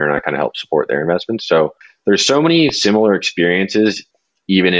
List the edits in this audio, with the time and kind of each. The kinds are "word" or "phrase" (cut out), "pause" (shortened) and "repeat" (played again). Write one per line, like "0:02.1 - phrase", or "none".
none